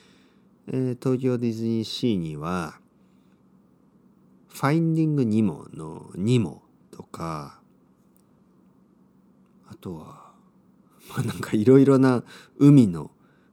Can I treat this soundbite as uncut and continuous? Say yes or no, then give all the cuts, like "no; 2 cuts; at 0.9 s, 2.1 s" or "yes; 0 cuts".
yes; 0 cuts